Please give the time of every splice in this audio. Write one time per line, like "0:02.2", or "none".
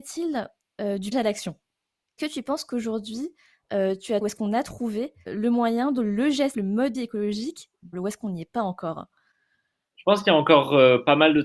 0:01.1
0:02.2
0:04.2
0:05.3
0:06.0
0:06.5
0:06.9
0:07.9